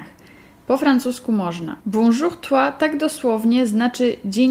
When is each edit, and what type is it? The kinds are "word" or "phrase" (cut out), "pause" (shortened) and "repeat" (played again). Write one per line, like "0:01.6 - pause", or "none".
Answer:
0:01.8 - pause